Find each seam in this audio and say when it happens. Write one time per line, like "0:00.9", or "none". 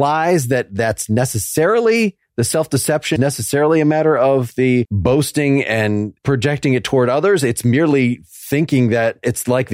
0:03.2